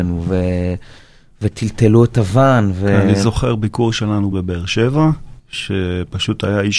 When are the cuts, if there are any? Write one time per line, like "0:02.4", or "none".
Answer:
0:04.3
0:05.4